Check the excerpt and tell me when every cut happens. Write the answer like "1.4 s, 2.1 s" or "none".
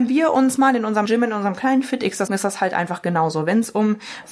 1.0 s, 2.3 s